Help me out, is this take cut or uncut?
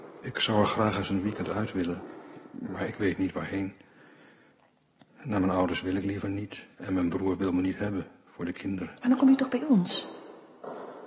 cut